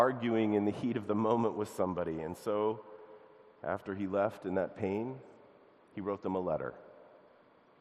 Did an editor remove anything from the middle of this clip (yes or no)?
no